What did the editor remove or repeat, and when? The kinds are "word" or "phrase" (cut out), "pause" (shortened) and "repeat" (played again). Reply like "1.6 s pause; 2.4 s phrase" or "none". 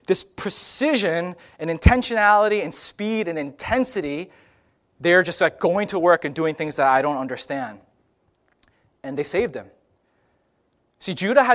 none